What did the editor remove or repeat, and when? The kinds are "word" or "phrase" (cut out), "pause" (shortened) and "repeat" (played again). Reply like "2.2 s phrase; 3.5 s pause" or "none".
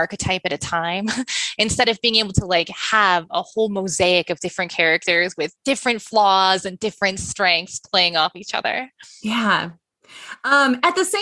none